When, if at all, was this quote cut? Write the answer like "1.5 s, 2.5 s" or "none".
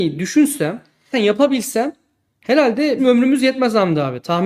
1.1 s, 3.0 s